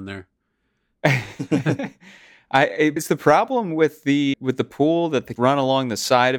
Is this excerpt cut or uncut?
cut